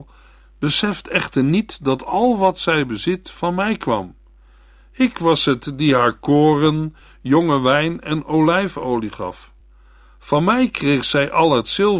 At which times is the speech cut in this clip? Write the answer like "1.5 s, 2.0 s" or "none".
none